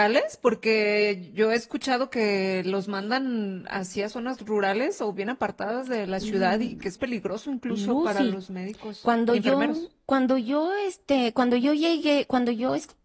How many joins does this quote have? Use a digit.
1